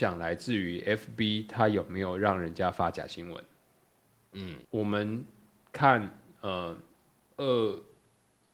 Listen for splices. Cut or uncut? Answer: cut